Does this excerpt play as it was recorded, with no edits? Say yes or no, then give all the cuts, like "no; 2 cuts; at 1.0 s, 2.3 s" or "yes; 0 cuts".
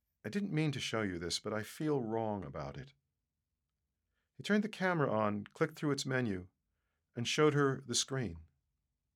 yes; 0 cuts